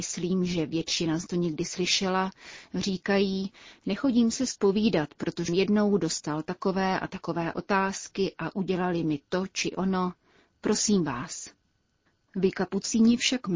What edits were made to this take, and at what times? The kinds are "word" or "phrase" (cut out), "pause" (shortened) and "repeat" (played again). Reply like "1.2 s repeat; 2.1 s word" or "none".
1.3 s word; 5.5 s word